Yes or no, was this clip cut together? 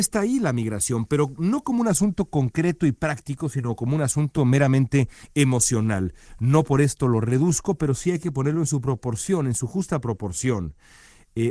no